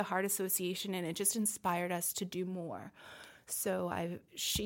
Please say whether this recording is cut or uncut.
uncut